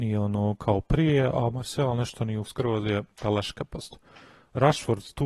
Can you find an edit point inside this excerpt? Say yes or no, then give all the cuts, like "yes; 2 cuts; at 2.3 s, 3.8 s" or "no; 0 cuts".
yes; 2 cuts; at 2.4 s, 3.1 s